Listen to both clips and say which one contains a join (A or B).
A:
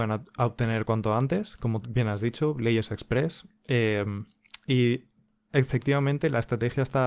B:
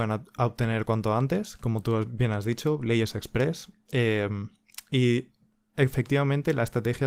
A